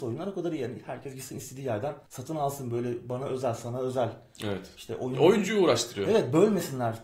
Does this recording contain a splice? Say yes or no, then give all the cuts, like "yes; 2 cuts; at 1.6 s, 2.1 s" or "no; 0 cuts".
yes; 1 cut; at 2.1 s